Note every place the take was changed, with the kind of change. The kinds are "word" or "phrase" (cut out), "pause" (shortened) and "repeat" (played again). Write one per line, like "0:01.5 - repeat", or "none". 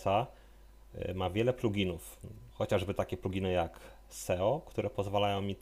0:02.5 - pause